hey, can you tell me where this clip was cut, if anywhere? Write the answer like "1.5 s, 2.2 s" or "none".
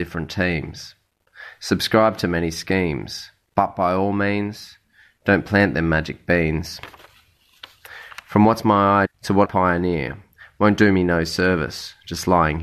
9.0 s, 9.4 s